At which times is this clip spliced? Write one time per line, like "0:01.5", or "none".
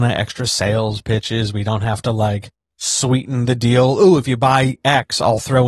none